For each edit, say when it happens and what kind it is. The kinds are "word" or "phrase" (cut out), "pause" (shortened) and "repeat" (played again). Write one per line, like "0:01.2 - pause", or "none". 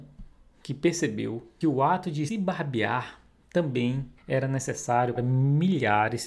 0:01.6 - word
0:02.3 - word
0:04.2 - pause
0:05.2 - word